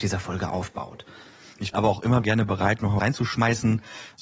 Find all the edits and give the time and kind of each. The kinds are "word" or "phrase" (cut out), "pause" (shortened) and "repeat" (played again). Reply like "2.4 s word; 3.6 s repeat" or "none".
1.7 s word; 2.2 s word; 3.0 s word